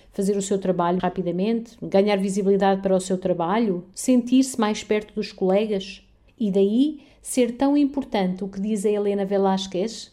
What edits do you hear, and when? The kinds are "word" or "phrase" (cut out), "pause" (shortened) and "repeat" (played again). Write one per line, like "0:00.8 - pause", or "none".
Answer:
0:01.0 - word
0:06.3 - pause